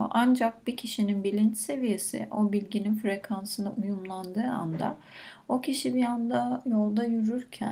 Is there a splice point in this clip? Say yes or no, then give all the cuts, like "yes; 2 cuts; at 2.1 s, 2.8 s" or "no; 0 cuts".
no; 0 cuts